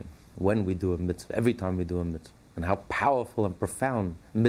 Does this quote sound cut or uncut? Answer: cut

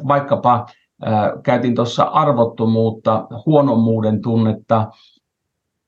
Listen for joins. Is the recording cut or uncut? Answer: uncut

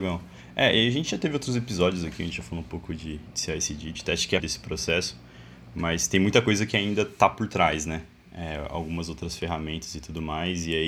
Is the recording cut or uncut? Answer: cut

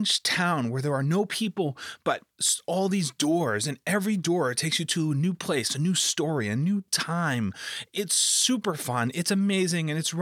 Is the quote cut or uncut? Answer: uncut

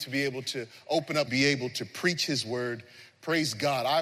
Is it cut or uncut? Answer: cut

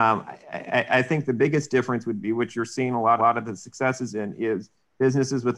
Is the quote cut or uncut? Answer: cut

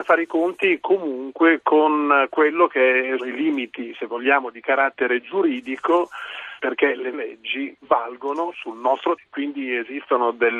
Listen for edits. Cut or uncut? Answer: cut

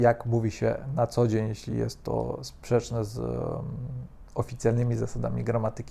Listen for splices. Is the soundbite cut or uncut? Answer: uncut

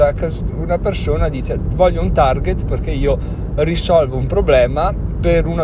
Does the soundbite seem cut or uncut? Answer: uncut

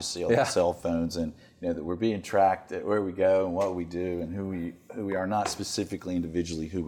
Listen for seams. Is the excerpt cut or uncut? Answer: uncut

